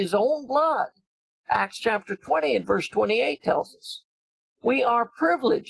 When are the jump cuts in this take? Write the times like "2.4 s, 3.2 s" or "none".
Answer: none